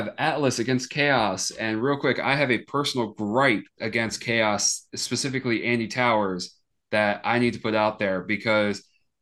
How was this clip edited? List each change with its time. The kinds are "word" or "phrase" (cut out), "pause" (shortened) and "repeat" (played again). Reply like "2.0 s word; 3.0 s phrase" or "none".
3.8 s word